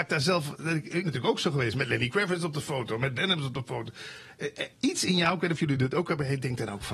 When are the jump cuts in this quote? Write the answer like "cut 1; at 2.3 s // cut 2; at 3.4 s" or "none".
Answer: cut 1; at 1.0 s // cut 2; at 3.2 s // cut 3; at 4.7 s